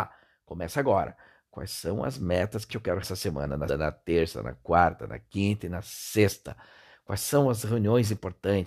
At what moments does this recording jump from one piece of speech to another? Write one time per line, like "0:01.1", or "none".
0:02.7
0:03.0
0:03.7